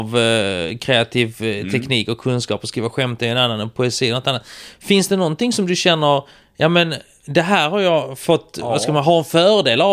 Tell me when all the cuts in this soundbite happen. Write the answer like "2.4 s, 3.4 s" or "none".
none